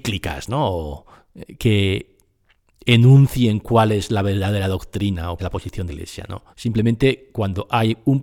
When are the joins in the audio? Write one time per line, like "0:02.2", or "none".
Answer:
0:01.6
0:05.4
0:05.9
0:06.5